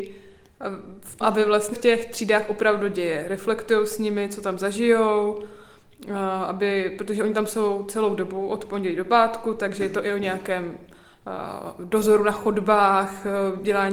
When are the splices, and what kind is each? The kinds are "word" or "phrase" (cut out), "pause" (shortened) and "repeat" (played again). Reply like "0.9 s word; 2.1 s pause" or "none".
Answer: 1.2 s word; 1.7 s phrase